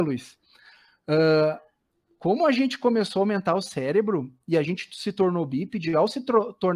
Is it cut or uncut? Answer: uncut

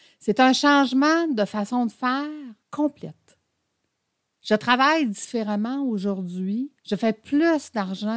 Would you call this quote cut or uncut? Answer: cut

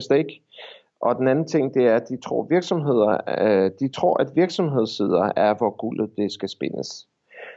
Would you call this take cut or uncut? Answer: uncut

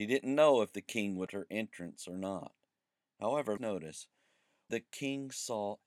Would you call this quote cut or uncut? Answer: cut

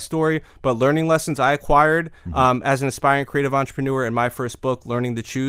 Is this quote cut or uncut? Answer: uncut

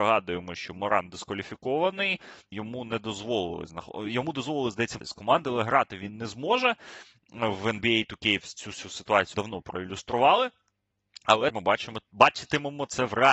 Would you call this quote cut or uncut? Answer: cut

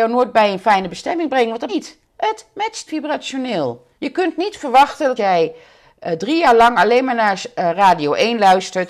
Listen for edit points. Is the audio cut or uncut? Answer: cut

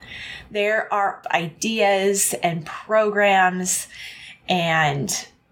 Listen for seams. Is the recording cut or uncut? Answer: cut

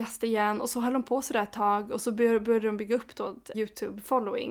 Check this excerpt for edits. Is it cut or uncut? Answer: cut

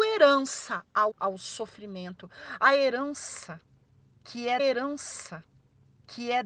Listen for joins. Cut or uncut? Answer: cut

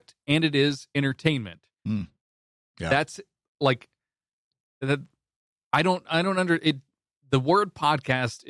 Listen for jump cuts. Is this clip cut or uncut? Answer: uncut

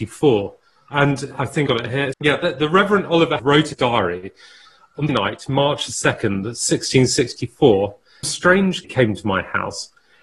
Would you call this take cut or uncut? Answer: cut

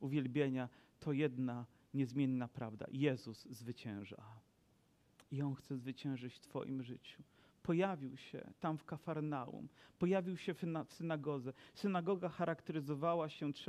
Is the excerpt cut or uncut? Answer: uncut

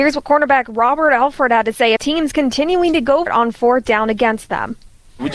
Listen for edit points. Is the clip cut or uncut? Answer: cut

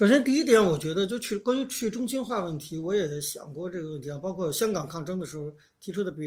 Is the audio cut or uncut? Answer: uncut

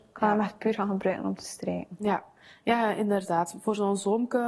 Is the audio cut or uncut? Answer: uncut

